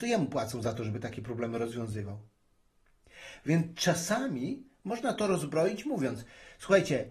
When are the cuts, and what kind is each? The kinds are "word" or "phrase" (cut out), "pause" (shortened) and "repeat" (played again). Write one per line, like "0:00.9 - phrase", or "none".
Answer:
none